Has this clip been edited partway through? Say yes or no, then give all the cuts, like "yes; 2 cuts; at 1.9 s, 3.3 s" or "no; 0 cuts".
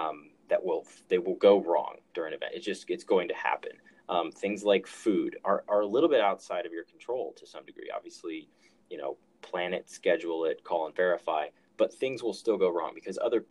no; 0 cuts